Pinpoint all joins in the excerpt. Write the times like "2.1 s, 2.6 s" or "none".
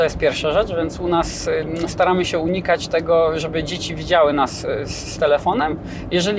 none